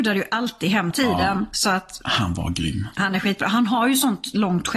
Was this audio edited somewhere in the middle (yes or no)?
yes